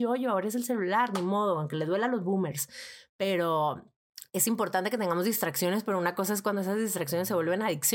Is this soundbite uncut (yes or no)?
no